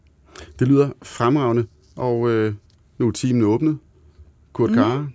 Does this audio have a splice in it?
no; 0 cuts

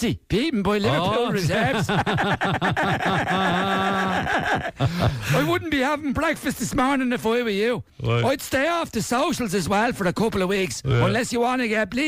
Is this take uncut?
yes; 0 cuts

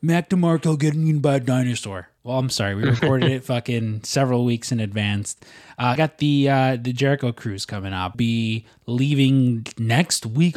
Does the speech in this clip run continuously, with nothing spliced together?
no; 3 cuts; at 2.2 s, 6.0 s, 8.1 s

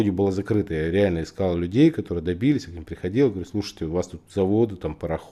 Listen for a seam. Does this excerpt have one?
no; 0 cuts

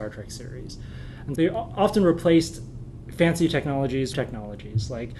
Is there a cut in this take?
yes; 2 cuts; at 1.4 s, 4.1 s

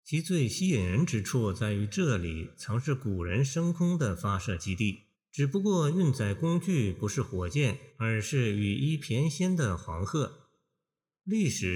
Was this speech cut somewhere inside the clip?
yes; 2 cuts; at 5.1 s, 7.9 s

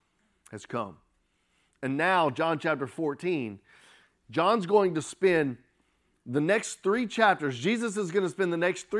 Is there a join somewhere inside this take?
no; 0 cuts

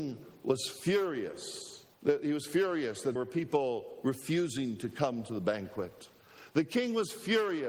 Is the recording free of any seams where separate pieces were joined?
no; 2 cuts; at 1.9 s, 3.2 s

